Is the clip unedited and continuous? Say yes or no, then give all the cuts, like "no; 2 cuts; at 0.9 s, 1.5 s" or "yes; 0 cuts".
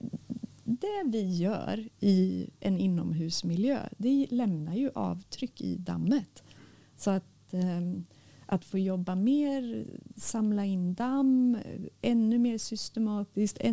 yes; 0 cuts